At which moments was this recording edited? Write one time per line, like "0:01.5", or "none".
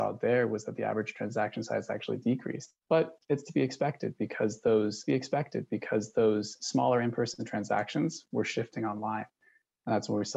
0:02.8
0:05.1